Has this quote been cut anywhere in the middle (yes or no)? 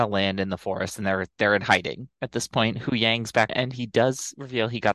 yes